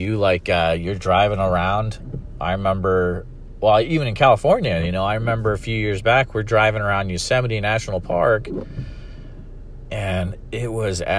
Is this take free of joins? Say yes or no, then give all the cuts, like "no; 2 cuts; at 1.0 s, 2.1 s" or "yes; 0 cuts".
yes; 0 cuts